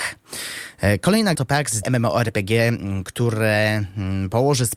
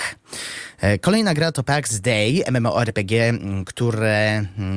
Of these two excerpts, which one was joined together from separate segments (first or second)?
first